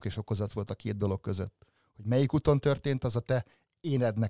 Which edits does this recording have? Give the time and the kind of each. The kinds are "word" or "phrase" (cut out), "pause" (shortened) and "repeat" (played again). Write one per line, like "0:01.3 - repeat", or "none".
none